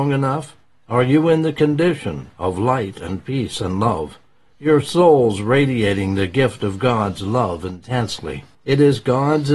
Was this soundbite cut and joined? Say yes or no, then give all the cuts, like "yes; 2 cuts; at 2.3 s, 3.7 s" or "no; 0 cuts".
no; 0 cuts